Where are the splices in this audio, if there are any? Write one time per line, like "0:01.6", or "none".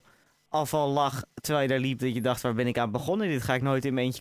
none